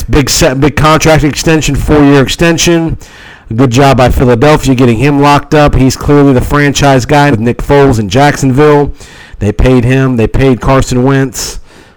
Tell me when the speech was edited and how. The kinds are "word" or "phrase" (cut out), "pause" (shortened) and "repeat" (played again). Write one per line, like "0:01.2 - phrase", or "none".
0:07.3 - word